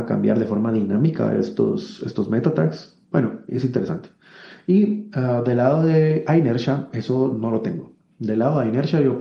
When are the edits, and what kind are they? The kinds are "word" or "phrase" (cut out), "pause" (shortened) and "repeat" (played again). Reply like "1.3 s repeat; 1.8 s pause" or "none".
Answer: 3.0 s pause